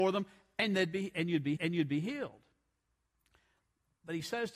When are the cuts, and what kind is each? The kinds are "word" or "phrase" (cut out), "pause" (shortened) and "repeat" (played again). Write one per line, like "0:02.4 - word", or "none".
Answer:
0:01.6 - repeat